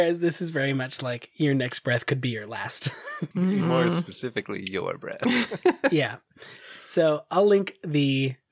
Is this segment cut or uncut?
cut